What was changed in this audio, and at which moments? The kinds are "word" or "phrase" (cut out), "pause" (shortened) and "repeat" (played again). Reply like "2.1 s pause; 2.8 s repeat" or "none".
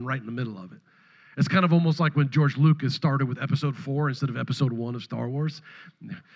none